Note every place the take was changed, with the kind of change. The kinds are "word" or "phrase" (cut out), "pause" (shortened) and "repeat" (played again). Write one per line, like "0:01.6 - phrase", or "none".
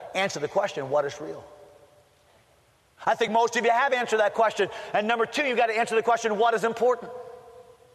none